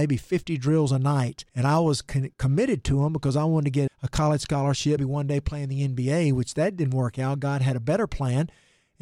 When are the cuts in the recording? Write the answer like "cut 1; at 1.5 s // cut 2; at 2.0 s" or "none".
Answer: cut 1; at 1.5 s // cut 2; at 2.3 s // cut 3; at 3.9 s // cut 4; at 5.0 s